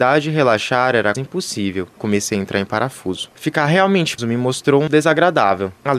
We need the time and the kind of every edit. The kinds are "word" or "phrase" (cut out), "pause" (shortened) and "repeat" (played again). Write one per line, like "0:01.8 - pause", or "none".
0:01.1 - word
0:02.0 - word
0:03.3 - pause
0:04.2 - word
0:04.9 - phrase